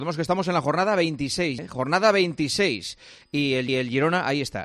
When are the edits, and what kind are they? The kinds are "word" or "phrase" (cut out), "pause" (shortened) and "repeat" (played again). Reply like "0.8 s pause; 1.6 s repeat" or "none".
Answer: 1.6 s word; 3.7 s repeat